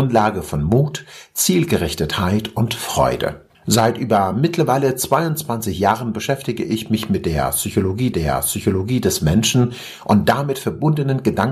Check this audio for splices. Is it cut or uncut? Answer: cut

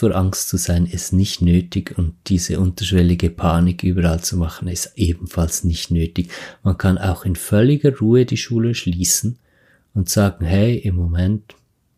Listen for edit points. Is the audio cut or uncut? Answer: uncut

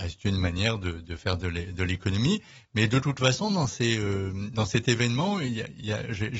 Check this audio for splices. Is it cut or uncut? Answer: uncut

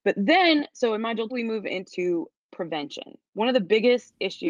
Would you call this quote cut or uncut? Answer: cut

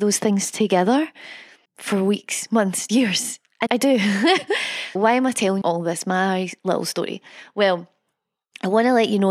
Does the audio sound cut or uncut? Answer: cut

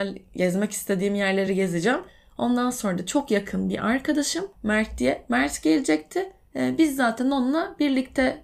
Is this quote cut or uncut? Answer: uncut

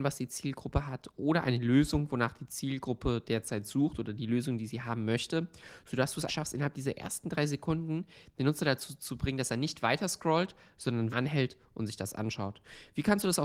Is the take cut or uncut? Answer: cut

